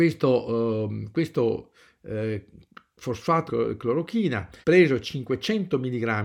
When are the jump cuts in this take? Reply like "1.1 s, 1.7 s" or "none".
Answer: 3.5 s, 4.6 s